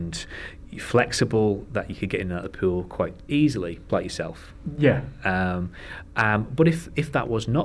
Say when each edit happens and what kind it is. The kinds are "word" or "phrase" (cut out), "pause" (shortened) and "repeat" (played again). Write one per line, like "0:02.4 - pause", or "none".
0:03.9 - word

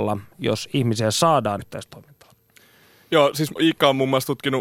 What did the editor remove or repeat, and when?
0:01.6 - word
0:03.6 - word

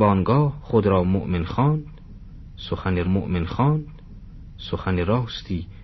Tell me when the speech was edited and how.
0:03.0 - repeat

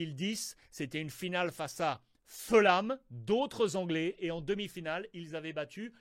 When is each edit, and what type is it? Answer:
none

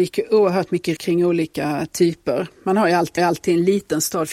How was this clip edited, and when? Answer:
0:01.0 - word
0:03.2 - repeat

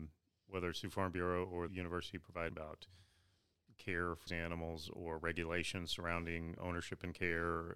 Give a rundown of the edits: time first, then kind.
0:01.7 - word
0:02.5 - word
0:04.3 - word
0:06.6 - word

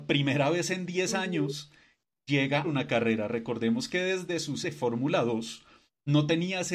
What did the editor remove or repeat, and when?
0:02.6 - phrase
0:04.6 - word

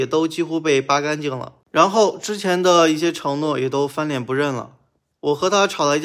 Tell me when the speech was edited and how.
none

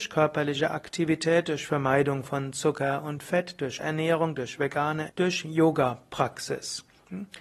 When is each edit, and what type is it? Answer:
0:03.8 - word
0:05.1 - word

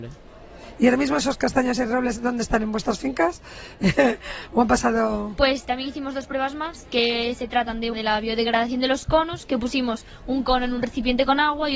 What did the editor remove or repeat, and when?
0:05.6 - word
0:07.9 - word

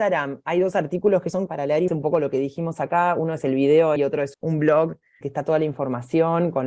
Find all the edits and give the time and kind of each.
0:01.5 - word
0:01.9 - word
0:04.0 - word
0:04.3 - word
0:05.2 - word

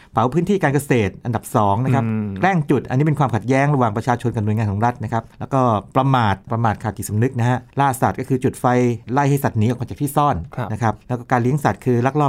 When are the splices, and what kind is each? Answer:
0:05.3 - pause
0:06.4 - pause
0:07.7 - pause
0:11.0 - pause

